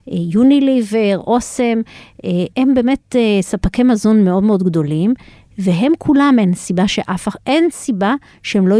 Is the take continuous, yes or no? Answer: no